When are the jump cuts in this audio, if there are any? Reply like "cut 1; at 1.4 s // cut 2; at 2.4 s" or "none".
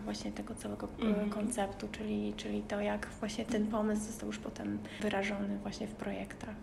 none